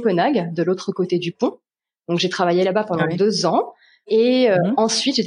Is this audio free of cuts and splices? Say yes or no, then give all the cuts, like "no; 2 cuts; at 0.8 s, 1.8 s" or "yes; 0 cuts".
yes; 0 cuts